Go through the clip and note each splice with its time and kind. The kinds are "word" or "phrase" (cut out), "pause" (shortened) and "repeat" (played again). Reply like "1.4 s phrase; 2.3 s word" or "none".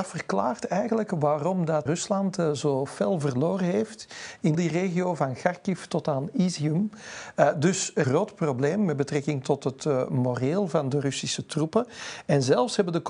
1.9 s word; 4.5 s word; 8.0 s phrase